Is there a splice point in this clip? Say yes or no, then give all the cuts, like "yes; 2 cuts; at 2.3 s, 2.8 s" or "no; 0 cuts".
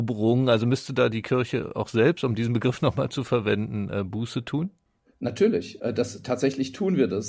no; 0 cuts